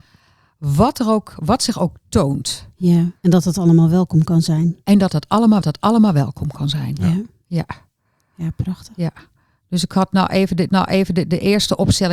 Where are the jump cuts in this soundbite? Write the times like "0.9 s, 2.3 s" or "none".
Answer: 3.2 s, 5.6 s, 10.7 s